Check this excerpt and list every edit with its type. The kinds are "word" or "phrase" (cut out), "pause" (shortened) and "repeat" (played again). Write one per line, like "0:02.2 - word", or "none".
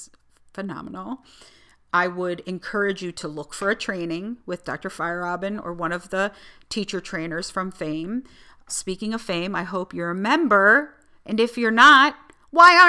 none